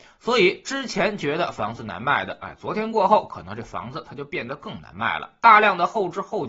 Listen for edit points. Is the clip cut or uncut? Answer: uncut